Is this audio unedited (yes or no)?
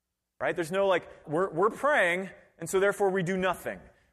no